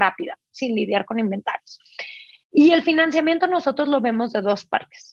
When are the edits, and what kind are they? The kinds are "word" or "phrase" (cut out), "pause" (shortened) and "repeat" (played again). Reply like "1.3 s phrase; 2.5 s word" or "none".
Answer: 2.4 s pause